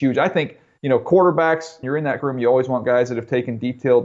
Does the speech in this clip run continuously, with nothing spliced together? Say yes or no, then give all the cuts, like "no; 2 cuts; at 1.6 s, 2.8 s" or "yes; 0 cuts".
no; 2 cuts; at 1.8 s, 2.2 s